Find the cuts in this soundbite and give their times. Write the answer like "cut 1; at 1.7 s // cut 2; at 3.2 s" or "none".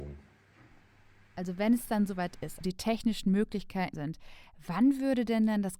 cut 1; at 2.6 s // cut 2; at 3.9 s